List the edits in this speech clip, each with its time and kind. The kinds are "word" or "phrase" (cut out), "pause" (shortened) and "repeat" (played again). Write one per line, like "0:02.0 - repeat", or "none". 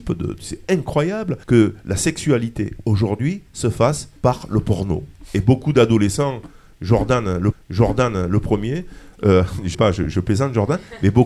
0:01.4 - pause
0:03.5 - pause
0:04.2 - pause
0:07.5 - repeat
0:09.7 - word